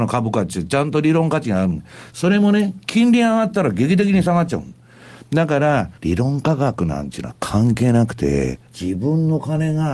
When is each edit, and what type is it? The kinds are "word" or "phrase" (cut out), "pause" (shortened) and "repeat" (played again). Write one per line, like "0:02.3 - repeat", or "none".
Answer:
0:06.0 - pause
0:08.7 - pause